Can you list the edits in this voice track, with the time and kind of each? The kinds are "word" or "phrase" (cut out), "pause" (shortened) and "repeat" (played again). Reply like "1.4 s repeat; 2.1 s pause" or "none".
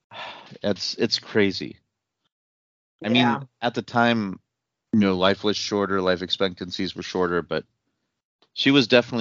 none

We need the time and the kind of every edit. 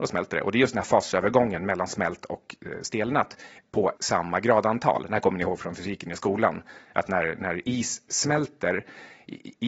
4.0 s word

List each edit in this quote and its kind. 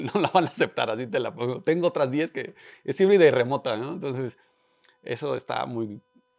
none

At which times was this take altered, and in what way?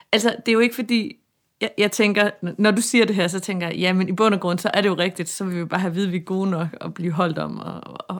none

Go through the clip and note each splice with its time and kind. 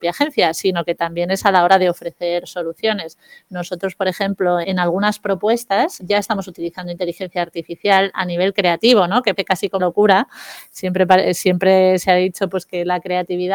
4.6 s word; 6.0 s word; 9.4 s word; 9.8 s word

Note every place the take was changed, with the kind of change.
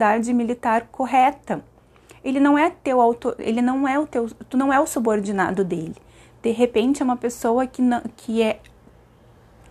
none

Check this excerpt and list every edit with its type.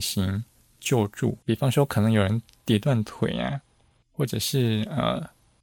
1.4 s pause

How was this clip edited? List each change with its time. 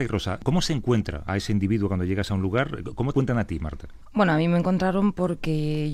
3.1 s word

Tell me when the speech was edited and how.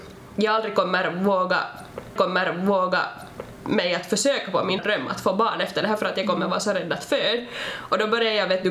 2.2 s repeat; 4.8 s word

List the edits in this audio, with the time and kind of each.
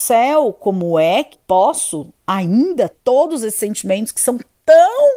1.3 s word; 2.9 s word

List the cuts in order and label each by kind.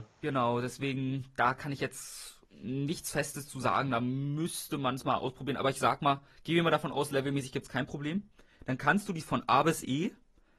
9.2 s word

